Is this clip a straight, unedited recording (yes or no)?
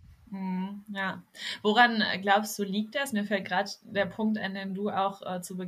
yes